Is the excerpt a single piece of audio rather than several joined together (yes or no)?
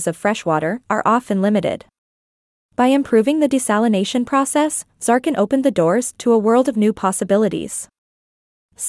yes